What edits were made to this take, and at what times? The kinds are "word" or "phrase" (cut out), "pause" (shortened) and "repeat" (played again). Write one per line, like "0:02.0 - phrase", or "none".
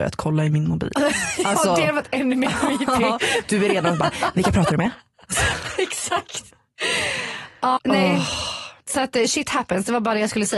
0:07.8 - word
0:08.8 - pause